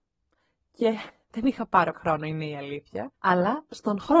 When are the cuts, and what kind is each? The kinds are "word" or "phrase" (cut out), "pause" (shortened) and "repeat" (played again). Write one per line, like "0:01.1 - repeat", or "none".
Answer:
0:01.9 - word
0:03.1 - pause

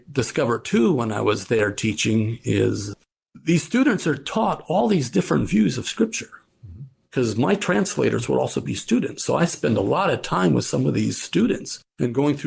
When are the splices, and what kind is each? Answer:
none

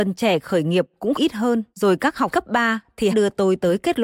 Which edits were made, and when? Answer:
0:01.1 - word
0:01.7 - pause
0:02.3 - word
0:03.1 - phrase

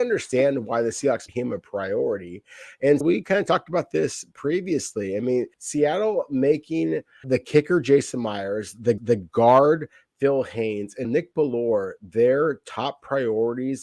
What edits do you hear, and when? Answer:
0:01.3 - word
0:03.0 - word
0:05.5 - pause
0:07.2 - word
0:09.0 - repeat
0:11.0 - word

